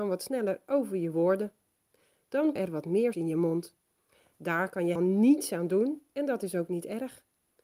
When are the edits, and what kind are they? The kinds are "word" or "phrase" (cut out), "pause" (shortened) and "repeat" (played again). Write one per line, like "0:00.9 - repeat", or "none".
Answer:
0:02.6 - word
0:03.1 - word
0:05.0 - word